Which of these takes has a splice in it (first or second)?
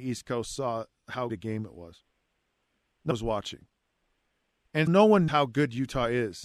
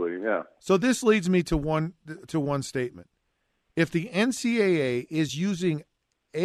first